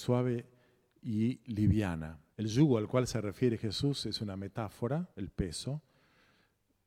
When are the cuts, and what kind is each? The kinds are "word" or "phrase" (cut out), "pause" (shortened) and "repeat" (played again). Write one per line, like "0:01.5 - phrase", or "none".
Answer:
0:02.3 - pause
0:05.1 - pause